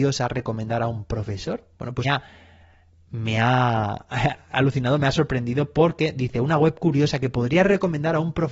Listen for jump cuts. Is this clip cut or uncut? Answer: cut